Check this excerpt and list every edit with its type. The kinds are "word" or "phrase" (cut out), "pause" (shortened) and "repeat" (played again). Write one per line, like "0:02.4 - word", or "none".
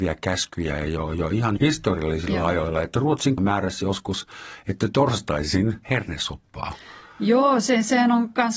0:01.6 - word
0:03.4 - word
0:05.8 - phrase